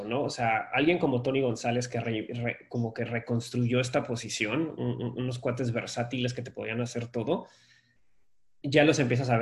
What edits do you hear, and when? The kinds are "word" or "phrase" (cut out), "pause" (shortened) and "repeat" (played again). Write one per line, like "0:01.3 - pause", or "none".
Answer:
none